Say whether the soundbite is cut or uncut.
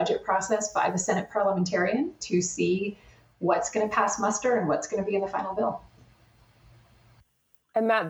uncut